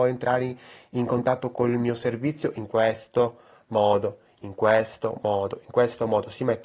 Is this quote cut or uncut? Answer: uncut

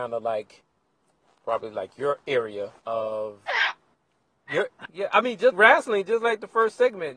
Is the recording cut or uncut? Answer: cut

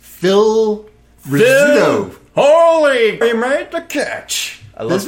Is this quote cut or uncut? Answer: cut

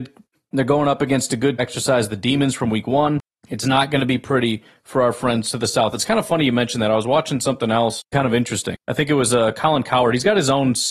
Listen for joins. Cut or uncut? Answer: cut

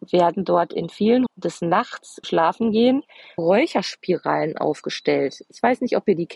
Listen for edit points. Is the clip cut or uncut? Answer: cut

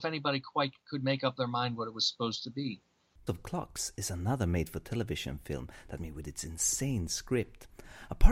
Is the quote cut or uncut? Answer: cut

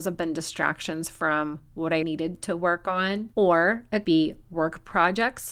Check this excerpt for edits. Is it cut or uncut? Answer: cut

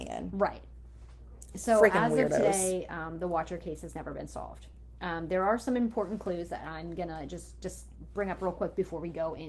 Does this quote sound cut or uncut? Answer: uncut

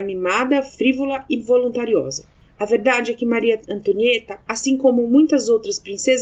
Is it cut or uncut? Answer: uncut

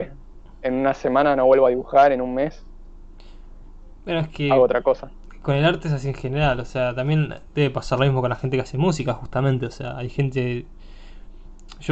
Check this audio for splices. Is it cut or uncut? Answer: cut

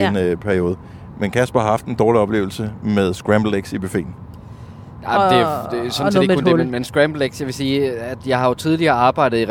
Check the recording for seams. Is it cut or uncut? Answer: uncut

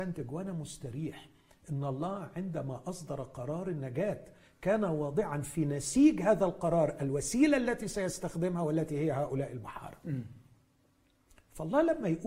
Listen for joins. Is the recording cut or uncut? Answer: uncut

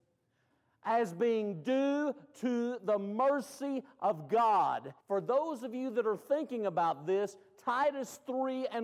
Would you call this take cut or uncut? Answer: cut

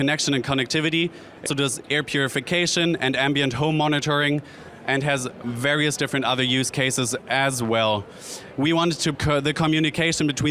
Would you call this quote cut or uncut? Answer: cut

